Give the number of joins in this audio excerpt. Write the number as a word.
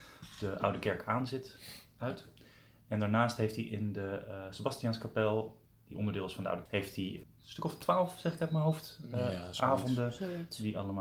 two